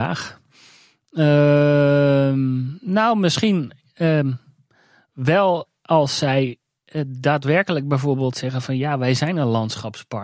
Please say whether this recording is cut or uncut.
uncut